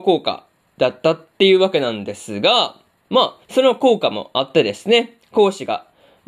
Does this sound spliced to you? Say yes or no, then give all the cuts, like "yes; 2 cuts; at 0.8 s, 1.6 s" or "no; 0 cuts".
yes; 1 cut; at 3.4 s